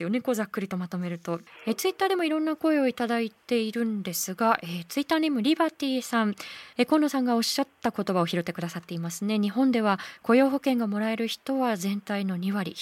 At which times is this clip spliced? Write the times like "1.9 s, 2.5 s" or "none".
6.7 s